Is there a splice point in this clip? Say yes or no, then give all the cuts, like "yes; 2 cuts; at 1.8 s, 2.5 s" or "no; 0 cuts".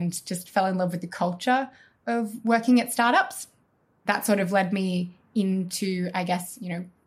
no; 0 cuts